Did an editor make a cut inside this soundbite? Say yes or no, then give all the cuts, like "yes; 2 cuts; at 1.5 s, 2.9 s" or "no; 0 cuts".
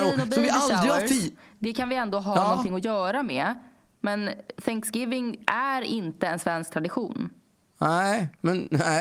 no; 0 cuts